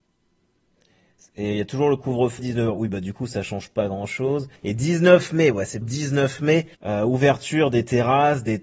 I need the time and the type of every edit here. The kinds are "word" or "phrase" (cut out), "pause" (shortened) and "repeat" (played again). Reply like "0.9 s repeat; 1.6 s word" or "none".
2.4 s word; 4.6 s pause; 5.8 s word; 6.7 s pause